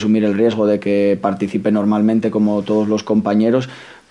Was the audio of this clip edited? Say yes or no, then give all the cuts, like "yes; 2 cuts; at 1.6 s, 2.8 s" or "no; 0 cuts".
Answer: no; 0 cuts